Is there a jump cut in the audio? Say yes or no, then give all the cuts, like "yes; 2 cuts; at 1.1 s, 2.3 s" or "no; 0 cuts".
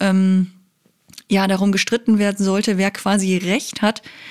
no; 0 cuts